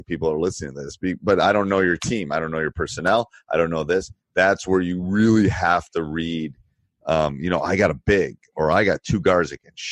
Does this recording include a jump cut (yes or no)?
no